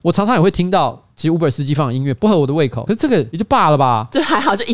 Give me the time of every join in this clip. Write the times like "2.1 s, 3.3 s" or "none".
2.9 s